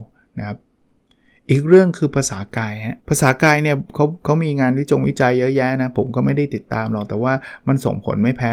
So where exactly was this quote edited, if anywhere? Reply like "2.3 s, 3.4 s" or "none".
3.0 s